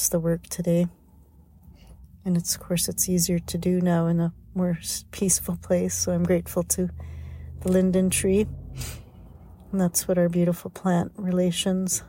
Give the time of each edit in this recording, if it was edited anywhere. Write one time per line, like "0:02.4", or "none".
none

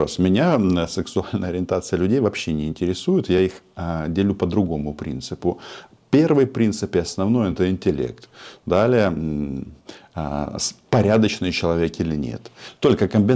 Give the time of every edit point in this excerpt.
none

